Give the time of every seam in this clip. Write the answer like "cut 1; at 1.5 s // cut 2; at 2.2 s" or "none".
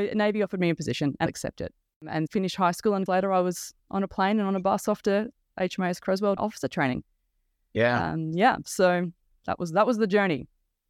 cut 1; at 1.3 s // cut 2; at 2.3 s // cut 3; at 3.1 s // cut 4; at 3.8 s // cut 5; at 6.4 s